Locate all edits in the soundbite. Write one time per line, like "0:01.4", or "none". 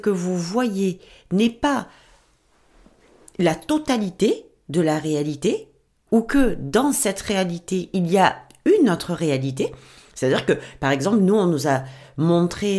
none